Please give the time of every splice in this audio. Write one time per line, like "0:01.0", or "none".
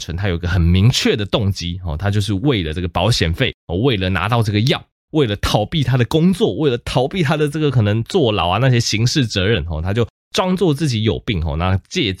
0:03.6